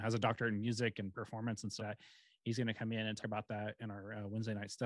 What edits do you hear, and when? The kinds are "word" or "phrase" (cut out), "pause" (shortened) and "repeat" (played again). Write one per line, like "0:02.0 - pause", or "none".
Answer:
0:01.8 - word
0:03.2 - word